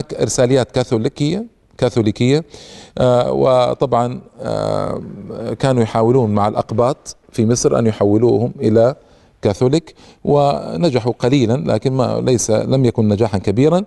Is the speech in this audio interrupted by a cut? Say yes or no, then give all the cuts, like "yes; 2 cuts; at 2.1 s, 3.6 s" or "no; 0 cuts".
no; 0 cuts